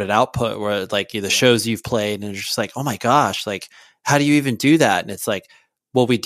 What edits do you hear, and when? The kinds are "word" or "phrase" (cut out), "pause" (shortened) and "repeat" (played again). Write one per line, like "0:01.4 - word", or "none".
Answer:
none